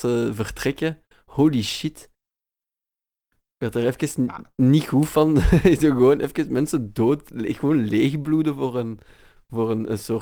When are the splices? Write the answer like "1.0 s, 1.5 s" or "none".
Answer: none